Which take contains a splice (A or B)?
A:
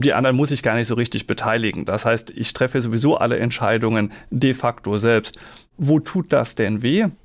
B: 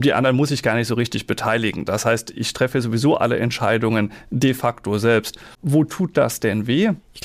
B